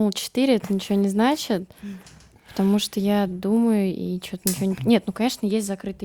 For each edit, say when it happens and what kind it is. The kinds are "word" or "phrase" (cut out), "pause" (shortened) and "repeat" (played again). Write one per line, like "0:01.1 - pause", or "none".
none